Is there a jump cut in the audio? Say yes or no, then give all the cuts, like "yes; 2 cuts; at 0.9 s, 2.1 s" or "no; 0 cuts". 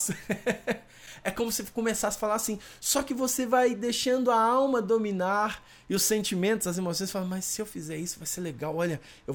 no; 0 cuts